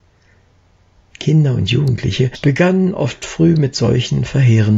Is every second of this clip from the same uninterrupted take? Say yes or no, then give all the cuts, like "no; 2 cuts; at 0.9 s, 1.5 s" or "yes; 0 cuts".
yes; 0 cuts